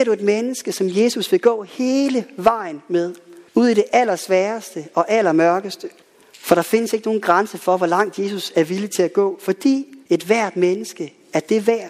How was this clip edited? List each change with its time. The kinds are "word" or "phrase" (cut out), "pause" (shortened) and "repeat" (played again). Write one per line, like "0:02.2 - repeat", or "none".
0:03.5 - pause
0:06.0 - pause
0:10.0 - pause